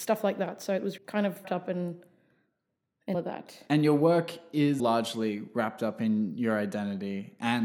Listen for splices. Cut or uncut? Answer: cut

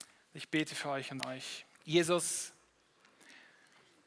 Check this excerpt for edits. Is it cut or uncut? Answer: cut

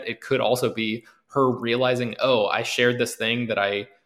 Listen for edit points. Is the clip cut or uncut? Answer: uncut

